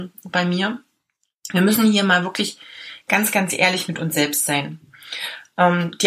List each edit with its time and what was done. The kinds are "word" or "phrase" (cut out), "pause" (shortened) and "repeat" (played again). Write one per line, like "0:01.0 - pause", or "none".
none